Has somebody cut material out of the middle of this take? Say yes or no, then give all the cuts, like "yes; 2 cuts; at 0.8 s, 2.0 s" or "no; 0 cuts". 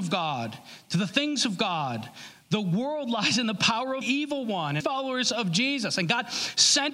yes; 2 cuts; at 4.0 s, 4.8 s